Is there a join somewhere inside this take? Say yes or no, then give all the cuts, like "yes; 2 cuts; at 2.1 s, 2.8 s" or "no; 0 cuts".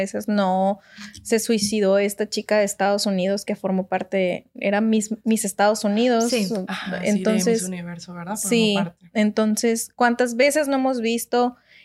no; 0 cuts